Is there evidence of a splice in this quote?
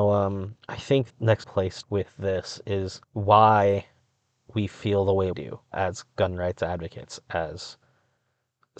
yes; 6 cuts; at 1.1 s, 1.4 s, 1.8 s, 3.0 s, 5.3 s, 5.7 s

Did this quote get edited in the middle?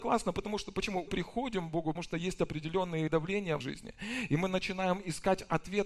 yes; 4 cuts; at 1.1 s, 2.0 s, 3.1 s, 3.6 s

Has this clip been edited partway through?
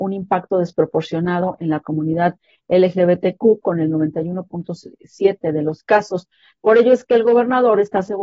no; 0 cuts

